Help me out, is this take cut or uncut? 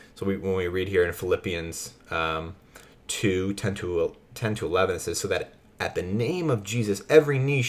cut